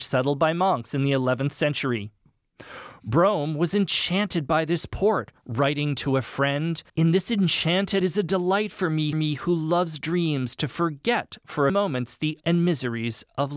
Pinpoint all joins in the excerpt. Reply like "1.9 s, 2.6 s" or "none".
5.4 s, 6.9 s, 8.0 s, 9.1 s, 11.7 s, 12.4 s